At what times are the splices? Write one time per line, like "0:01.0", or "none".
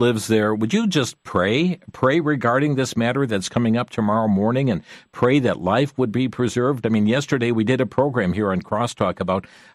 none